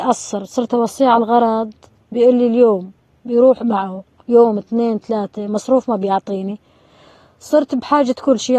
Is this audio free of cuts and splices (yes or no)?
yes